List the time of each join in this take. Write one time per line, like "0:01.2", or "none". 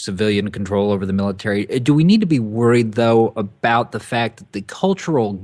0:04.5